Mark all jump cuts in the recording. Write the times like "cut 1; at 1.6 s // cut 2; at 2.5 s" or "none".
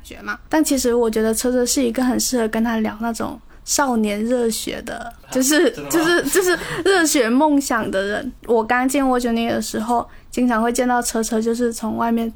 cut 1; at 8.4 s